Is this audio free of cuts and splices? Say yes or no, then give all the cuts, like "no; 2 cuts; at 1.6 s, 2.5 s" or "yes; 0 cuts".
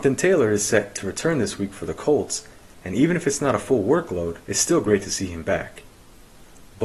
no; 1 cut; at 4.4 s